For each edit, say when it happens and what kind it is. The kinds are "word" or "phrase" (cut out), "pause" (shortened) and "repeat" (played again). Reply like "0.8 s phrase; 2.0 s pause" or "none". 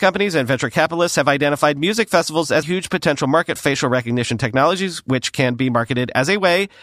2.6 s word; 3.6 s word